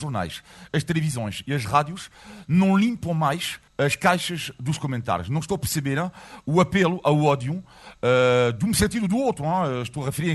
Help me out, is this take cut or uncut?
cut